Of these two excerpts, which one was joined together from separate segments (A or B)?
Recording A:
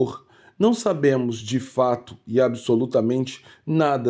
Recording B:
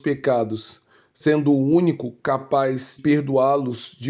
B